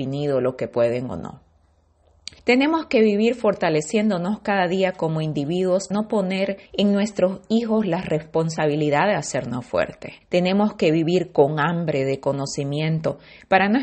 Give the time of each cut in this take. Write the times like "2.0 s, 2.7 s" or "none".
2.4 s, 5.9 s, 6.7 s, 10.2 s